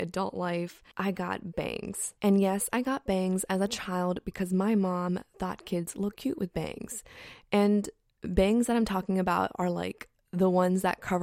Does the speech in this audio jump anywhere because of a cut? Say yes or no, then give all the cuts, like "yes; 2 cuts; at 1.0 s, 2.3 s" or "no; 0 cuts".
yes; 2 cuts; at 0.9 s, 2.2 s